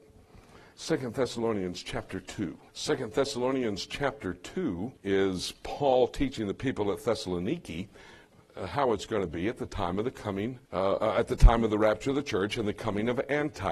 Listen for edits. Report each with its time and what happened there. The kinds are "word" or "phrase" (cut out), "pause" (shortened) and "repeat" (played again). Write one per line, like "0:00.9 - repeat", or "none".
0:02.7 - pause
0:05.0 - pause
0:10.6 - pause